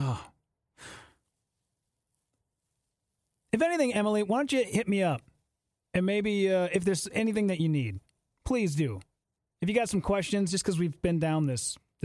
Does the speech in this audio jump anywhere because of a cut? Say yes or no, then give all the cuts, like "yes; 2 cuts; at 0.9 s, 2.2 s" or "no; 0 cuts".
no; 0 cuts